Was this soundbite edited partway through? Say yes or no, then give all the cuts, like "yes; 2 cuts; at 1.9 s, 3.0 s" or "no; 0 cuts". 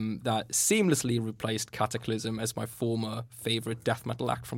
no; 0 cuts